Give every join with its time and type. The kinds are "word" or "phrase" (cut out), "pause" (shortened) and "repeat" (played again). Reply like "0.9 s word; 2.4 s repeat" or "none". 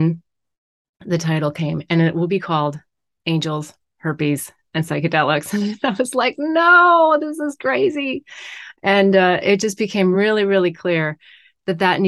none

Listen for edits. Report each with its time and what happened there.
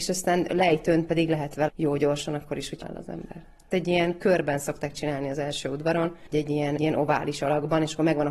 1.7 s word; 2.8 s word; 3.7 s word; 6.3 s word; 6.8 s word

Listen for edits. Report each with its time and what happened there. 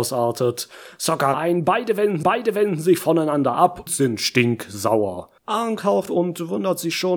1.3 s phrase; 2.2 s repeat; 3.9 s word; 5.4 s pause; 6.1 s word

